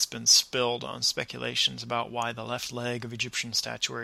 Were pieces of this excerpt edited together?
no; 0 cuts

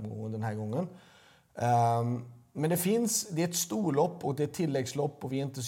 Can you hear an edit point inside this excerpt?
no; 0 cuts

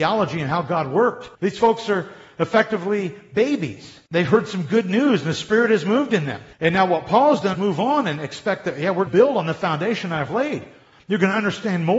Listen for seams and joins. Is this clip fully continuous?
no; 5 cuts; at 1.3 s, 4.1 s, 6.5 s, 7.5 s, 9.1 s

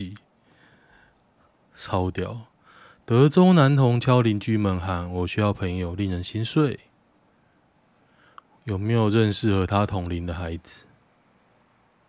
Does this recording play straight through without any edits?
yes; 0 cuts

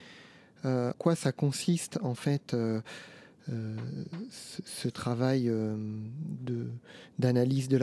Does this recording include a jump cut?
yes; 1 cut; at 0.9 s

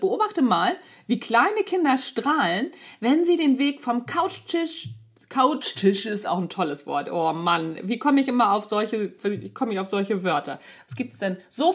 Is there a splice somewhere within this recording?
no; 0 cuts

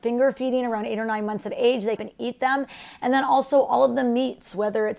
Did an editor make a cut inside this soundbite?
yes; 1 cut; at 2.0 s

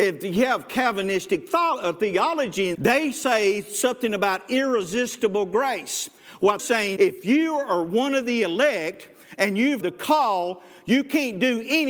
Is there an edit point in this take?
yes; 4 cuts; at 2.7 s, 6.6 s, 7.0 s, 9.8 s

